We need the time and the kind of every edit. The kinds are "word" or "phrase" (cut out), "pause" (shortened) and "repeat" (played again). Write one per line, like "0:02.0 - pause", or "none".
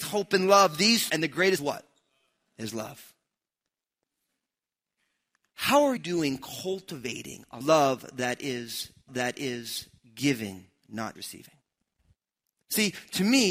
0:01.1 - word
0:01.6 - phrase
0:06.0 - word
0:07.6 - phrase
0:09.1 - repeat
0:11.2 - word